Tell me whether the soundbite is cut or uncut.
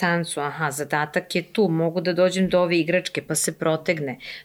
uncut